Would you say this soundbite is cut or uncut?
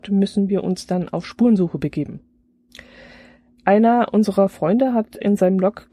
uncut